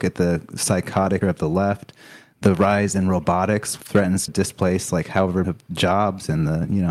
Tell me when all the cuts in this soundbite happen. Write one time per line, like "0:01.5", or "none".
0:01.2
0:03.8
0:04.3
0:05.4